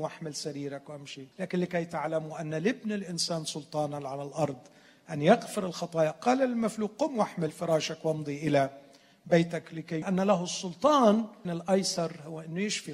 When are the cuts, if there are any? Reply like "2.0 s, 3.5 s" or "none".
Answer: 1.3 s, 10.0 s, 11.4 s